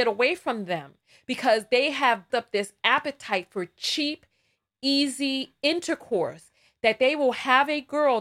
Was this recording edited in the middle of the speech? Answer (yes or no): yes